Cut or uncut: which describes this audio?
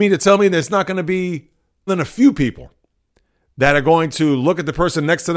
cut